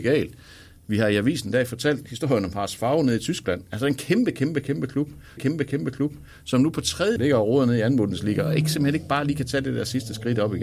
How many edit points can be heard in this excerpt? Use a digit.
2